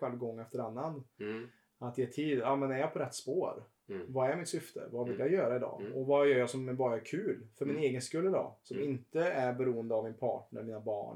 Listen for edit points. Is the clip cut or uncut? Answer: uncut